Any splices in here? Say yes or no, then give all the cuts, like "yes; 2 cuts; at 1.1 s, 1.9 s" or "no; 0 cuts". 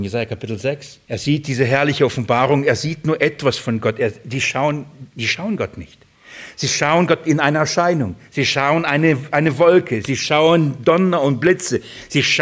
yes; 1 cut; at 1.0 s